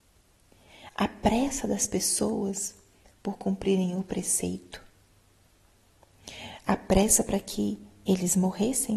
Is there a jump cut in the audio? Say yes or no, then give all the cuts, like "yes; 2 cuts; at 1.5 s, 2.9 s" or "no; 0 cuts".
no; 0 cuts